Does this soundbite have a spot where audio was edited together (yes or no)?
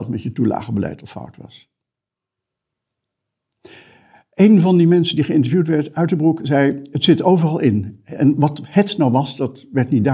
no